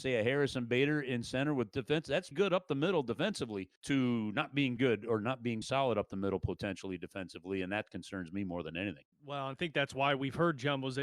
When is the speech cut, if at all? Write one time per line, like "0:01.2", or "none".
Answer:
0:02.3
0:03.8
0:04.8
0:05.6
0:09.1
0:09.5